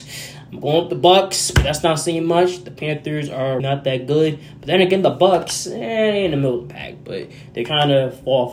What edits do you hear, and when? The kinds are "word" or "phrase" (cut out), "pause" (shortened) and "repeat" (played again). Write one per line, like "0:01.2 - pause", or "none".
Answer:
0:03.6 - word